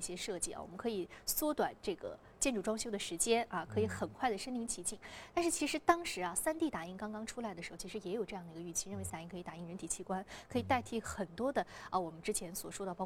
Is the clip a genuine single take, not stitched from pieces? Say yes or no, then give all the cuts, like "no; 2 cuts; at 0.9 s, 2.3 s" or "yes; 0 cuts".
no; 1 cut; at 9.1 s